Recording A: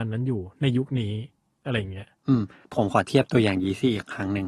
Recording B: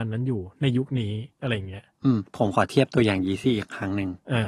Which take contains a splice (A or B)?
B